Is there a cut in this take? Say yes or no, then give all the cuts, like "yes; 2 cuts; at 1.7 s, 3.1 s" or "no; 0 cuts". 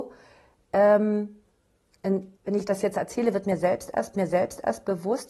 yes; 2 cuts; at 2.4 s, 4.1 s